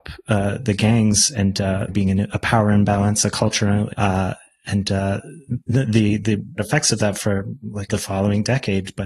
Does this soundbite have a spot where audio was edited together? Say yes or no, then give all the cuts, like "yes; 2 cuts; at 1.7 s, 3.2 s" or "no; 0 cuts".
yes; 5 cuts; at 1.9 s, 3.9 s, 5.6 s, 6.6 s, 7.9 s